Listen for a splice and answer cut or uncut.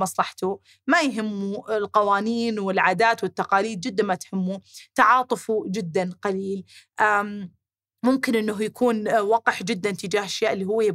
uncut